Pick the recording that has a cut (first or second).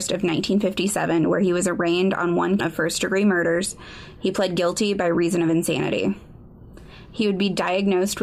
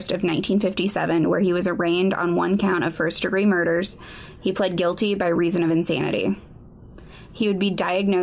first